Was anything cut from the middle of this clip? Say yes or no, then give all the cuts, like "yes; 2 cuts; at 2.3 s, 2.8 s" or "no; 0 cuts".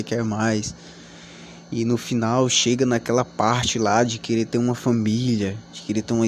no; 0 cuts